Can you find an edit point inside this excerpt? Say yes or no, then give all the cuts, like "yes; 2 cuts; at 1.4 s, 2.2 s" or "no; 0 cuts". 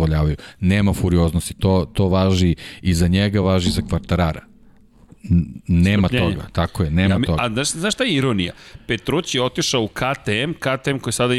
no; 0 cuts